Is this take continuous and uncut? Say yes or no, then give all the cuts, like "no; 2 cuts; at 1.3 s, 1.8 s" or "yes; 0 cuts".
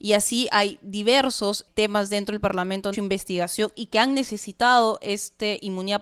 no; 1 cut; at 2.9 s